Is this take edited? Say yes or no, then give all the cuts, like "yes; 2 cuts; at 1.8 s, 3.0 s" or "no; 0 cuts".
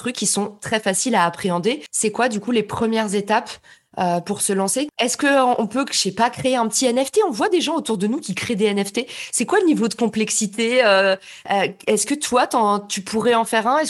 no; 0 cuts